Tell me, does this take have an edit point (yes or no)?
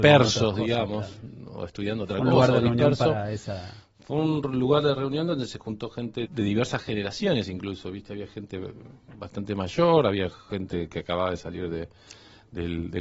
yes